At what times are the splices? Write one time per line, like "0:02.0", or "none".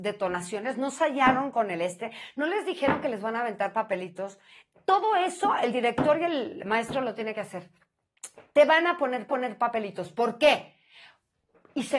0:09.3